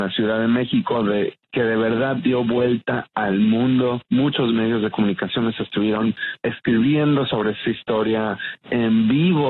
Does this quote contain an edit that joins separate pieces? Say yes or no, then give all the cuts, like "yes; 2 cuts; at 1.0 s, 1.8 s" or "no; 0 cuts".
yes; 2 cuts; at 6.4 s, 8.6 s